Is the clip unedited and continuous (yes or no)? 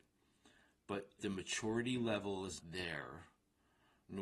no